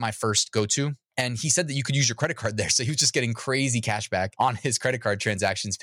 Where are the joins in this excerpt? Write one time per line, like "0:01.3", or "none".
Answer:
none

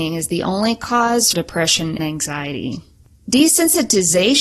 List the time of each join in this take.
0:01.3
0:02.0

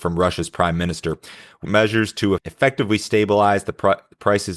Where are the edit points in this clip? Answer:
0:01.6
0:02.4

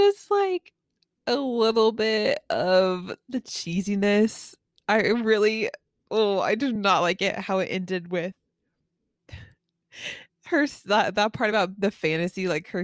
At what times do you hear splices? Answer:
none

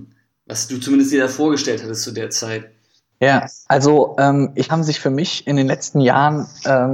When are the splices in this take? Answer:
0:02.9
0:04.7

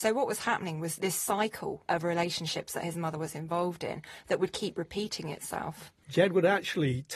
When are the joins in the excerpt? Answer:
0:01.0
0:01.9

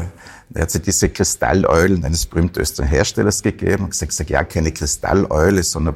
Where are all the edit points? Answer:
0:04.1

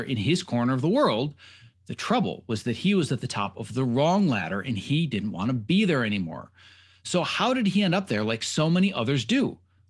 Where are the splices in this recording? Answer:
none

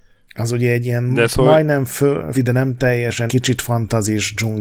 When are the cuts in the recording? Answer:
0:02.3
0:03.3

